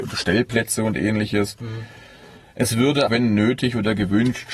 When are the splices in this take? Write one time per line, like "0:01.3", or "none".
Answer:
0:03.1